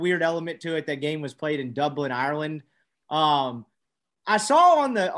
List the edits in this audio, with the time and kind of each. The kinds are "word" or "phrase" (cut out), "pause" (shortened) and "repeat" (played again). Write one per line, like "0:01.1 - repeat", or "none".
none